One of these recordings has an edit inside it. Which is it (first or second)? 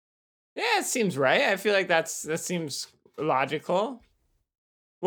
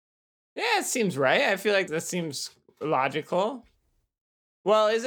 second